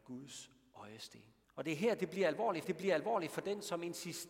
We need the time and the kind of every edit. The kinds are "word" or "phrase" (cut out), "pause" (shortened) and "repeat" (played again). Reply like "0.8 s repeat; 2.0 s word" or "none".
1.4 s pause; 2.6 s repeat